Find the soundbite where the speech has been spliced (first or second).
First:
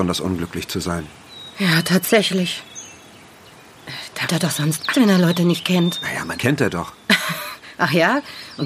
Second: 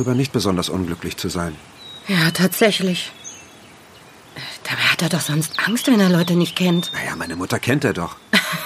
first